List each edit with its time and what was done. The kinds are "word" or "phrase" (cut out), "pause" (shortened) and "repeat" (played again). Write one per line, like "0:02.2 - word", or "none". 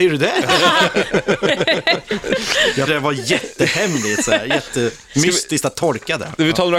0:02.9 - word